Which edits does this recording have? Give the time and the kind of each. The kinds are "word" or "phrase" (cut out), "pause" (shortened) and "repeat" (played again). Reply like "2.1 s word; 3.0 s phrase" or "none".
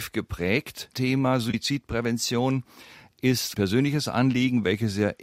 0.9 s phrase; 3.5 s phrase